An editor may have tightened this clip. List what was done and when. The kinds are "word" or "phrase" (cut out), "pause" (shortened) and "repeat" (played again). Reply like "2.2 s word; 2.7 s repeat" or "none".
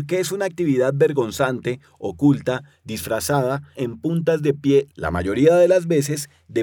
3.7 s word